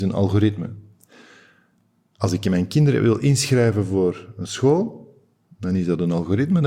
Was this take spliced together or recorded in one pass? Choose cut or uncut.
uncut